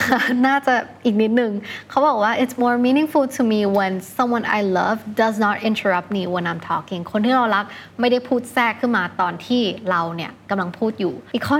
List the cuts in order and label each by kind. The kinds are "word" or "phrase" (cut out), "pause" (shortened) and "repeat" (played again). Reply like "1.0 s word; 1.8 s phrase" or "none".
none